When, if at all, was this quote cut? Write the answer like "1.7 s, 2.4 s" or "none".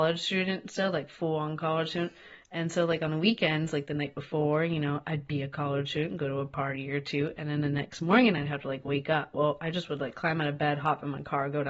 none